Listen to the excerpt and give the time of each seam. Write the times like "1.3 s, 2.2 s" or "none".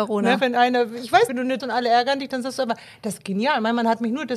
1.3 s, 1.6 s